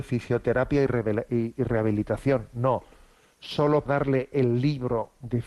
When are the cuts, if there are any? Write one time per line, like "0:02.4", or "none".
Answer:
0:03.9